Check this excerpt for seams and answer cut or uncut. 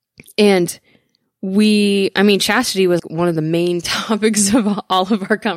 cut